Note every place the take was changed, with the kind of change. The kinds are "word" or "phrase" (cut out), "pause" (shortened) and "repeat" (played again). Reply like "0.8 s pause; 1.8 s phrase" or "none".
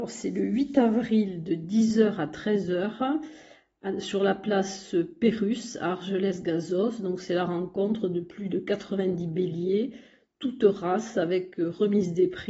none